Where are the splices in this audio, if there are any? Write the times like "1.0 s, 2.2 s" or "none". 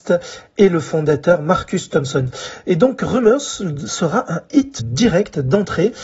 4.8 s